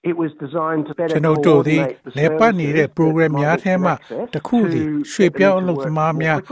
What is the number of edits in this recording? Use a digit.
0